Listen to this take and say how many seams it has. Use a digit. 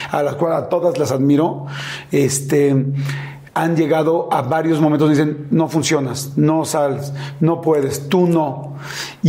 1